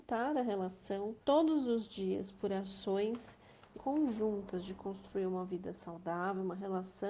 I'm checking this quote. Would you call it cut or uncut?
cut